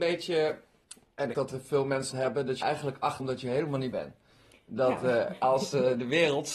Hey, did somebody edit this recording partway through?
yes; 5 cuts; at 1.3 s, 2.1 s, 2.6 s, 3.2 s, 3.9 s

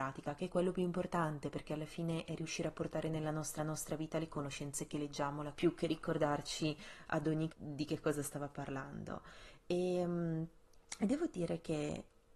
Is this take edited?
yes; 3 cuts; at 3.6 s, 5.5 s, 7.5 s

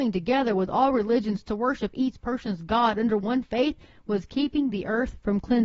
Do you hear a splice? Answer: no; 0 cuts

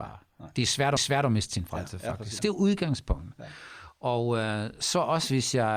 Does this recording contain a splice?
yes; 2 cuts; at 1.0 s, 2.4 s

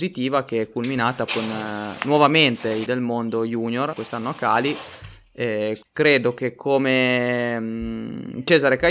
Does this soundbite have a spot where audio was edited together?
yes; 4 cuts; at 1.3 s, 2.9 s, 3.9 s, 5.8 s

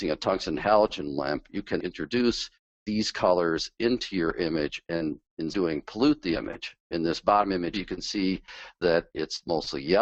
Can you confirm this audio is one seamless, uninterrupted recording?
no; 4 cuts; at 1.8 s, 4.8 s, 5.5 s, 7.7 s

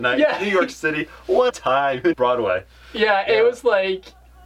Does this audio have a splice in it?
yes; 2 cuts; at 1.5 s, 2.1 s

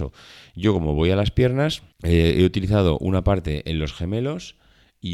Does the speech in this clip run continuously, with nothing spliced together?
no; 1 cut; at 1.9 s

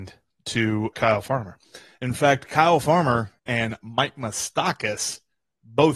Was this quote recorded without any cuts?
no; 2 cuts; at 0.9 s, 3.4 s

